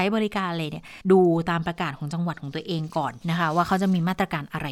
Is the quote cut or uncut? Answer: cut